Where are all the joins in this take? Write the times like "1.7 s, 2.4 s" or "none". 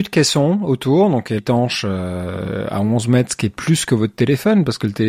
1.4 s